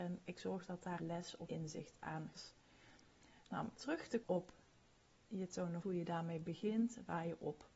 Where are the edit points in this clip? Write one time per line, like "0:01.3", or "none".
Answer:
0:01.0
0:01.5
0:02.3
0:03.8
0:04.2
0:05.2
0:05.8